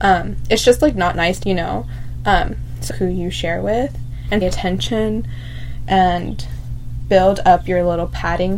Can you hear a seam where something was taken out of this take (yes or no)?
yes